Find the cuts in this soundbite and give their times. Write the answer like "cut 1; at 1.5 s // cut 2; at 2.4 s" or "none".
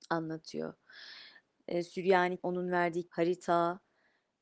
cut 1; at 2.4 s // cut 2; at 3.1 s